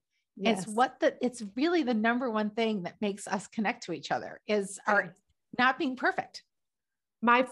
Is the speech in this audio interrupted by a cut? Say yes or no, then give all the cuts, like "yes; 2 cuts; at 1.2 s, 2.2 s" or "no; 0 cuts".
yes; 1 cut; at 5.3 s